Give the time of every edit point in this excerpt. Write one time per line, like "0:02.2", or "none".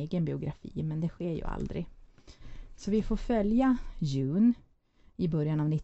none